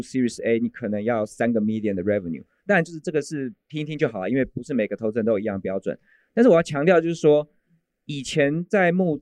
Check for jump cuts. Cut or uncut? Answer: uncut